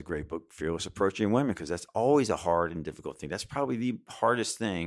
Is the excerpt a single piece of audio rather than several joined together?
yes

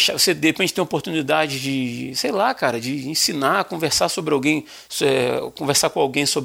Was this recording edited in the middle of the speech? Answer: no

